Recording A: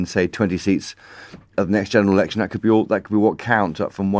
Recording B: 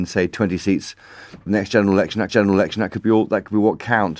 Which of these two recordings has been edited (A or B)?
B